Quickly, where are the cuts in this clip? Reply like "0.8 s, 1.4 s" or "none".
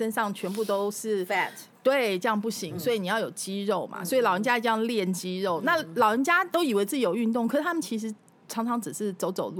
none

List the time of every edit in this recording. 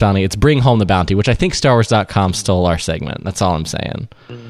none

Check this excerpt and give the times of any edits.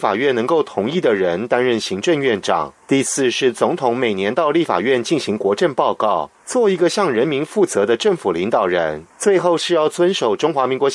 2.8 s, 6.4 s, 9.1 s

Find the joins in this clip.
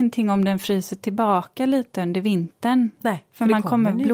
none

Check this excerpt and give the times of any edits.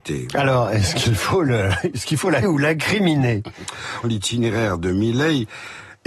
2.4 s, 4.0 s

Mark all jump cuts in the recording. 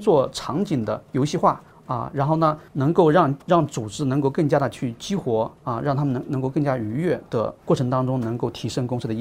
1.7 s, 2.7 s, 3.4 s, 5.6 s, 7.6 s

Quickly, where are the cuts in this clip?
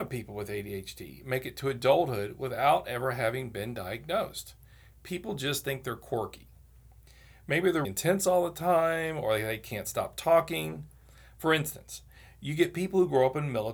7.8 s

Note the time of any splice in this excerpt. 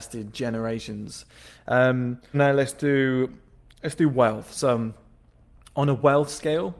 2.3 s

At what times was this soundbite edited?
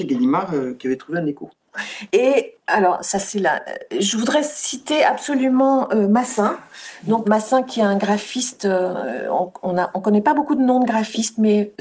7.2 s

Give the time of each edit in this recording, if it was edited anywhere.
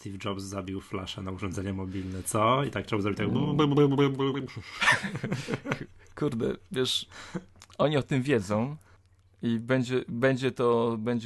none

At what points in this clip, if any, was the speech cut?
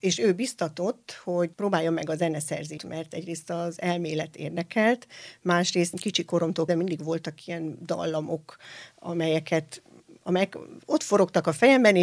1.5 s, 2.8 s, 5.9 s, 6.7 s

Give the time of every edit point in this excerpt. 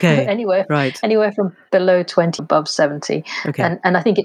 2.4 s

